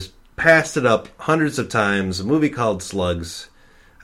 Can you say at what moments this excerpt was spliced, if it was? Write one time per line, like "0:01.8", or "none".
none